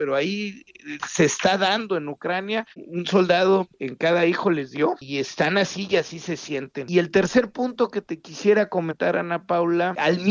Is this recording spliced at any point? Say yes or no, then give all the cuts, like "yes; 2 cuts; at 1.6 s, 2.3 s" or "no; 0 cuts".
yes; 1 cut; at 1.0 s